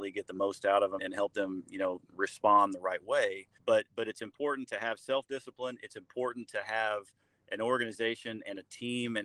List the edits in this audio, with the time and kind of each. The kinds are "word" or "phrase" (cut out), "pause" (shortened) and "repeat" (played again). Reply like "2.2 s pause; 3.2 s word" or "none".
1.0 s word; 3.6 s word